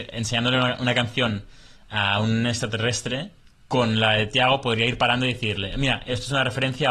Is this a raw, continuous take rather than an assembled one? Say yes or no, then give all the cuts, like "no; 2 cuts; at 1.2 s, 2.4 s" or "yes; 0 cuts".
no; 1 cut; at 3.4 s